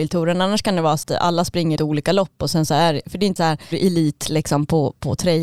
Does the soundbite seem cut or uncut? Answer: cut